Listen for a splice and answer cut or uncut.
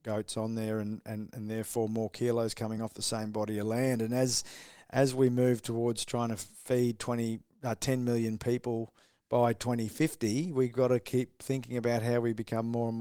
uncut